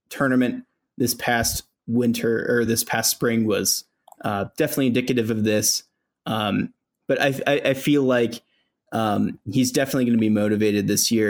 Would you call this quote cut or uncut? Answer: uncut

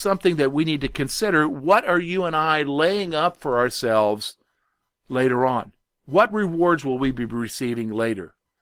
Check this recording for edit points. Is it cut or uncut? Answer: uncut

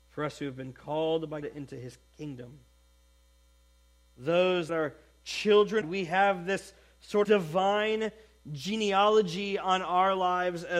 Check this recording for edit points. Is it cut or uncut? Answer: cut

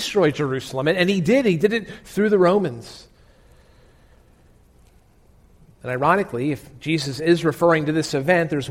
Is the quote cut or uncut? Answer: uncut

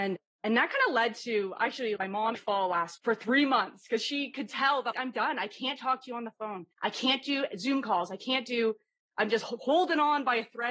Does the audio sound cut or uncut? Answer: cut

